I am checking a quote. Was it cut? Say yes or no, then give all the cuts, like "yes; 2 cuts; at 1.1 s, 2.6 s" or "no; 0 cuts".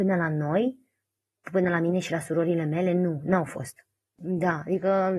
no; 0 cuts